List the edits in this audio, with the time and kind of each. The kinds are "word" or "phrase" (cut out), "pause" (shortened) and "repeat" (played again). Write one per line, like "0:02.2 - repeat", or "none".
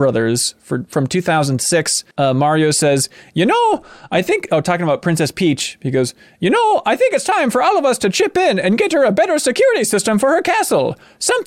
0:02.1 - pause